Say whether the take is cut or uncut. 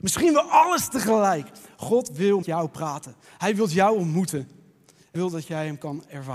cut